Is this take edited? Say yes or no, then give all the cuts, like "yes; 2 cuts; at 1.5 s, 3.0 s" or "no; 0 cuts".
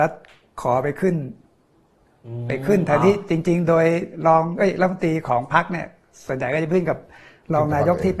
no; 0 cuts